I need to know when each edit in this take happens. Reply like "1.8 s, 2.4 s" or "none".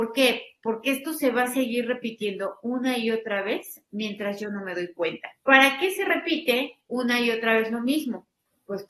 5.4 s